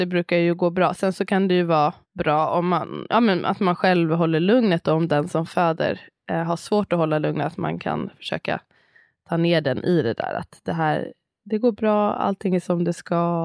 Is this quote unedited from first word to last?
no; 1 cut; at 2.0 s

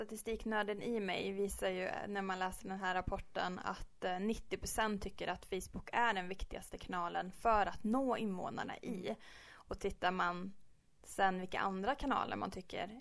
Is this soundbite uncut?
yes; 0 cuts

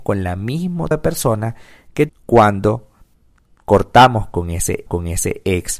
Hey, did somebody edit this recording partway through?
yes; 3 cuts; at 0.9 s, 2.1 s, 4.9 s

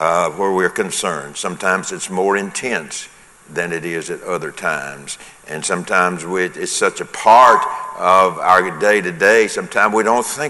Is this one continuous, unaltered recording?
yes; 0 cuts

